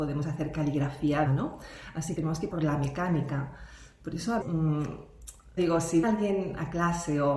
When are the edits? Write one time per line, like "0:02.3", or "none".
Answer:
0:01.3
0:02.2
0:02.5
0:04.4
0:05.6
0:06.0